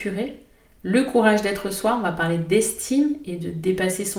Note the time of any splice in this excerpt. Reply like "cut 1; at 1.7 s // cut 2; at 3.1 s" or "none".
none